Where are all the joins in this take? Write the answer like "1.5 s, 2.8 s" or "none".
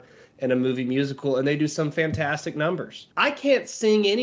3.1 s